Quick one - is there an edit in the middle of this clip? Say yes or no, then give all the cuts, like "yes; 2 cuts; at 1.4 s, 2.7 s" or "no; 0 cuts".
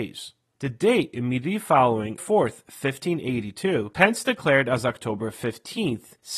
yes; 2 cuts; at 2.2 s, 3.9 s